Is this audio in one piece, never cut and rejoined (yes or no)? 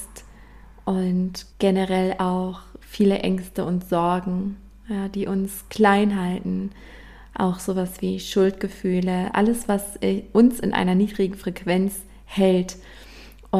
no